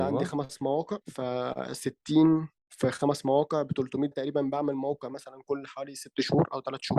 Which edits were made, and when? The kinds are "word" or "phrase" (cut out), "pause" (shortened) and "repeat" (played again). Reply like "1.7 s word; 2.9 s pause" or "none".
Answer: 1.0 s pause; 2.6 s pause; 4.1 s phrase